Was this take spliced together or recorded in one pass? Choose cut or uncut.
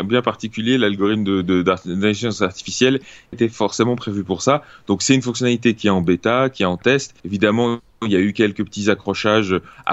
cut